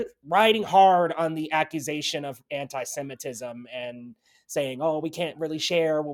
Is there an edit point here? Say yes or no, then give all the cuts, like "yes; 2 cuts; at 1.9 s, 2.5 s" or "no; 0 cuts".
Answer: no; 0 cuts